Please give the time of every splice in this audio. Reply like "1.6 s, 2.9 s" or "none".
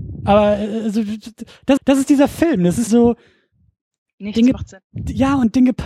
1.8 s, 2.9 s